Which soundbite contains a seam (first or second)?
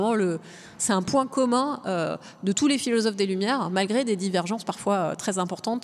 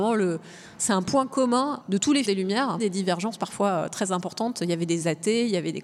second